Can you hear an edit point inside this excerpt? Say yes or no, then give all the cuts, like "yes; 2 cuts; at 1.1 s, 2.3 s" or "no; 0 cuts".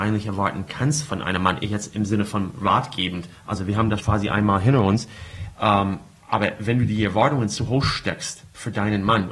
yes; 2 cuts; at 3.4 s, 4.0 s